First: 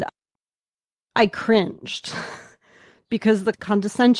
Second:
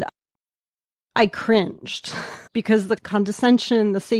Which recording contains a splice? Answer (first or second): second